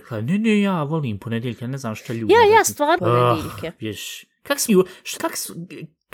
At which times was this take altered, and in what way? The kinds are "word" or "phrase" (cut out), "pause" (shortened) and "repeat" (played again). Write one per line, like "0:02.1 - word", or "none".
0:03.0 - word
0:04.7 - word
0:05.2 - word